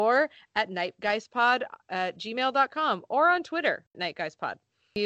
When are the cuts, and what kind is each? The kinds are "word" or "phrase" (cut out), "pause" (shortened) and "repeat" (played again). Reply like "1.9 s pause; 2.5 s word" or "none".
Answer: 3.9 s word